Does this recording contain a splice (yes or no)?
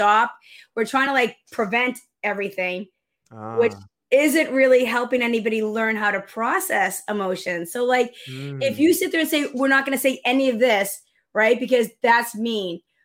no